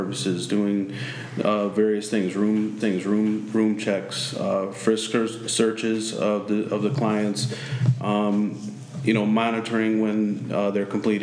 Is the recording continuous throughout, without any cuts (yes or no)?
no